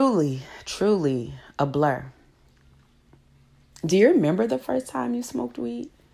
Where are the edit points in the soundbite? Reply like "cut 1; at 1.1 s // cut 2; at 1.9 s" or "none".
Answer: none